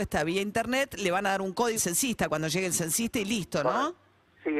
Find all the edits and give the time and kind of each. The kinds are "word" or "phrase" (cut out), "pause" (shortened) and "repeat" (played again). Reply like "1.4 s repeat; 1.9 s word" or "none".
1.7 s word